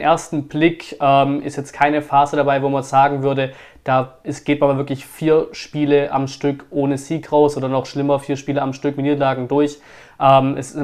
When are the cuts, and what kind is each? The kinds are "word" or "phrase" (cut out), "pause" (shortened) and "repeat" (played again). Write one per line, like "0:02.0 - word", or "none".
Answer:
none